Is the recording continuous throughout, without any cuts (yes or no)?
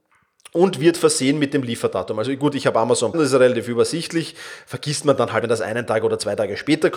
no